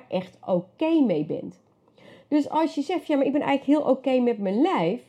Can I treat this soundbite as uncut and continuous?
yes; 0 cuts

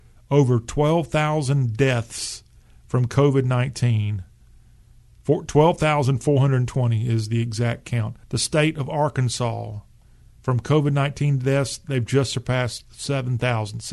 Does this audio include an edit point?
yes; 1 cut; at 8.2 s

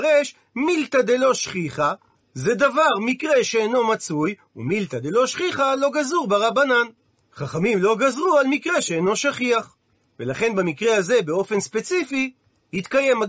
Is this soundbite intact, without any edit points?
yes; 0 cuts

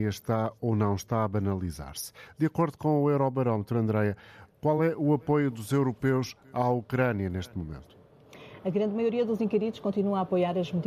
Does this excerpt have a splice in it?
no; 0 cuts

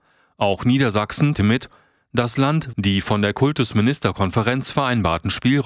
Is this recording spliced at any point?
yes; 2 cuts; at 1.3 s, 2.7 s

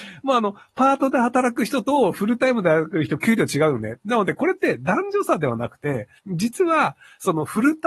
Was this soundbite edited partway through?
yes; 1 cut; at 6.2 s

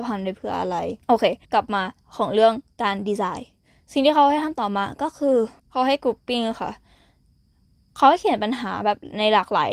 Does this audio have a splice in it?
yes; 3 cuts; at 1.0 s, 1.4 s, 5.6 s

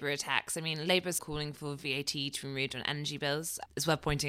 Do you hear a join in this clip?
yes; 1 cut; at 1.2 s

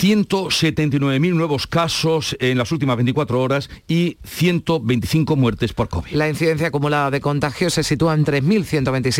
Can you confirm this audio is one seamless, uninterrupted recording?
yes; 0 cuts

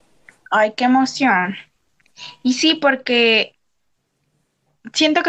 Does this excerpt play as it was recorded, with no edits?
yes; 0 cuts

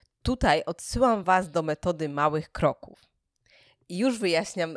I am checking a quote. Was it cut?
no; 0 cuts

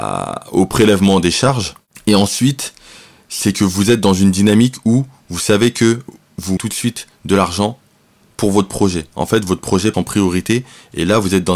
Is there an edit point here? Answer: yes; 2 cuts; at 6.6 s, 9.9 s

